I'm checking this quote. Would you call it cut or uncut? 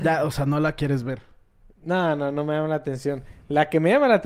uncut